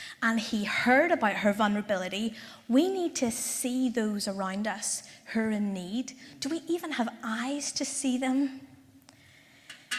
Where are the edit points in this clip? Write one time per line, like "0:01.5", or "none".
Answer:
none